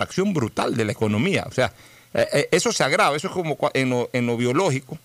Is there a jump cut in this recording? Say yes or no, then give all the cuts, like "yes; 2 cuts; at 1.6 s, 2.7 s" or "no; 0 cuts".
no; 0 cuts